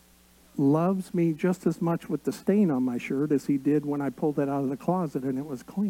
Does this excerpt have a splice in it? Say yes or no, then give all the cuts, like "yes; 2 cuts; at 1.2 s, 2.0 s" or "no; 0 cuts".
no; 0 cuts